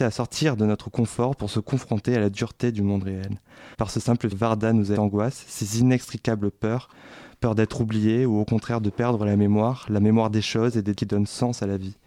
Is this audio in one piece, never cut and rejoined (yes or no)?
no